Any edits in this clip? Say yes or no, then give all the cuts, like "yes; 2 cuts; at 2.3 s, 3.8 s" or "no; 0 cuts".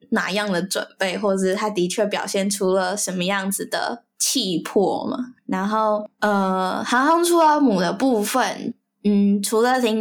no; 0 cuts